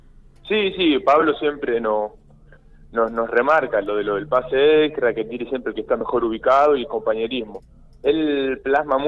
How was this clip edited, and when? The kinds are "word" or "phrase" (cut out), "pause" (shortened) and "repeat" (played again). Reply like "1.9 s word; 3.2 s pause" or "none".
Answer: none